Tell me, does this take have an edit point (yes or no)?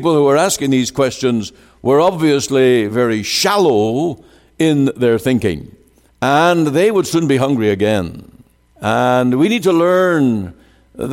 no